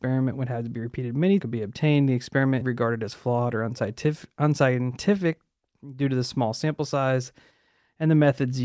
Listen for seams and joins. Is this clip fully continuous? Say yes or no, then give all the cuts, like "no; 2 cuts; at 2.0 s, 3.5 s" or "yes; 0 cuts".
no; 2 cuts; at 1.4 s, 2.6 s